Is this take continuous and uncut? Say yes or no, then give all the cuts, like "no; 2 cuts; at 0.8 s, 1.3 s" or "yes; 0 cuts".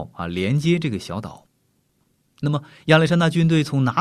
yes; 0 cuts